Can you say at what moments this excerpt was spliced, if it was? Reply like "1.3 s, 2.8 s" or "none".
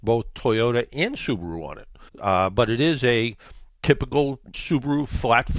2.1 s, 3.7 s, 4.5 s